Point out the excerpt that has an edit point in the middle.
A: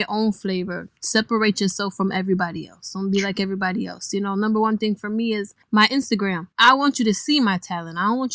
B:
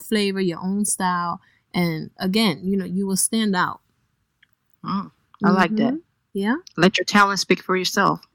A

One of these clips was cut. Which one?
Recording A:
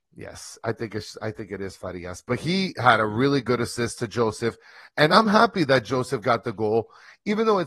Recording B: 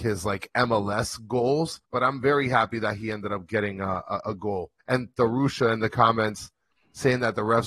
B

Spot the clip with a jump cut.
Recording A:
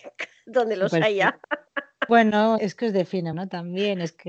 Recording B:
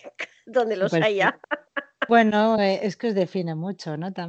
A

